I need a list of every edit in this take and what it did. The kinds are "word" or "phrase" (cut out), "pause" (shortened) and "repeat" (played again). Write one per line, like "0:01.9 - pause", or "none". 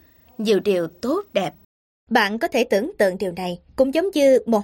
0:01.6 - pause
0:03.7 - pause